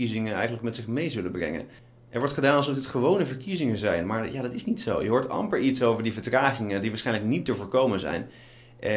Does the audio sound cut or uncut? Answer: uncut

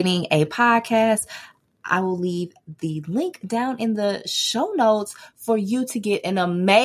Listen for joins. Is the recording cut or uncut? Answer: uncut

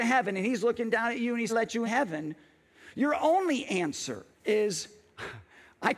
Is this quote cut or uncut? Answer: cut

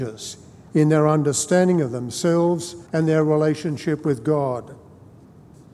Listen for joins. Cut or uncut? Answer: cut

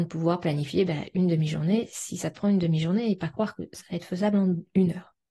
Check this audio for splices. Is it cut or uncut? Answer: uncut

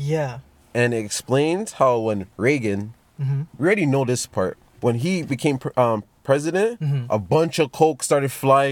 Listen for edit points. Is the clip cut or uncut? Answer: cut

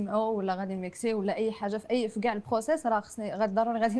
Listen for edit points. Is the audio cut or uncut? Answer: uncut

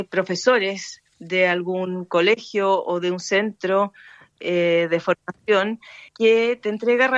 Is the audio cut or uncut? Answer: cut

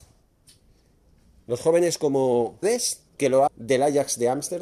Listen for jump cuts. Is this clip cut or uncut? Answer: cut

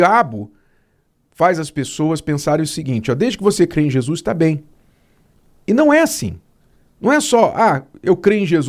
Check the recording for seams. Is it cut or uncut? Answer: uncut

